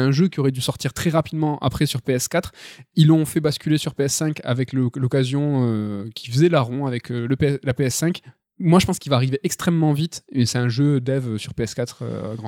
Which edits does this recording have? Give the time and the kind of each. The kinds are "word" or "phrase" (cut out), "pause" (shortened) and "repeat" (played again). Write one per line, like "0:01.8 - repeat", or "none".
none